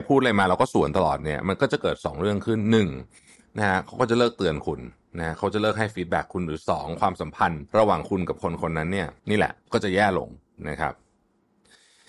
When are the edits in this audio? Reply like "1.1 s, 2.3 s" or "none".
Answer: 7.7 s, 9.2 s, 9.6 s